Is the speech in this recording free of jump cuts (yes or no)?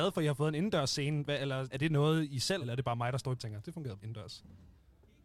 no